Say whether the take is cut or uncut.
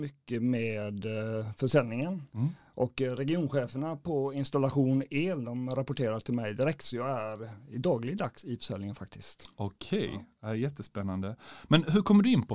uncut